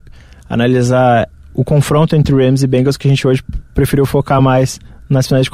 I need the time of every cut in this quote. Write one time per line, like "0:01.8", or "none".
none